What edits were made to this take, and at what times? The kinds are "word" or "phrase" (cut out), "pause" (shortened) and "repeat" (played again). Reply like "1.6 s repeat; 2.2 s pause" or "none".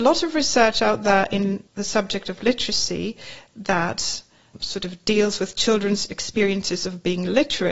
1.7 s pause